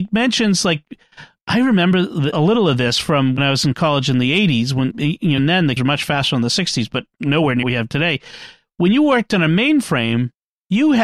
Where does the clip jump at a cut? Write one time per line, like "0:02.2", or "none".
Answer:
0:02.3
0:03.4
0:04.9
0:05.4
0:05.8
0:07.6